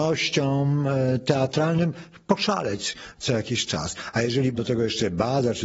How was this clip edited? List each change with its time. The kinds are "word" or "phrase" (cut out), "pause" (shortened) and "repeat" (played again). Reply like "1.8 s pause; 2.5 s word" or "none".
4.5 s word